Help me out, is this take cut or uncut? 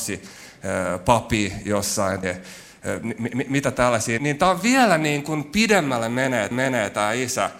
cut